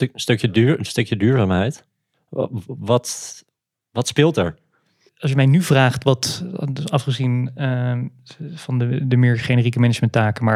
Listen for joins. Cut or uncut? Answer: uncut